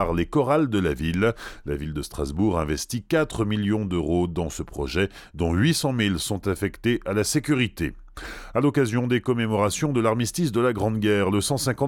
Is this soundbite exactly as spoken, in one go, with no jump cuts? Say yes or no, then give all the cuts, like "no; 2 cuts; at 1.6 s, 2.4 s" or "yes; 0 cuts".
yes; 0 cuts